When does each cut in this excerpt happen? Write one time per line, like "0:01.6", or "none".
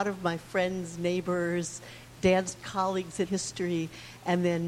0:02.6
0:03.3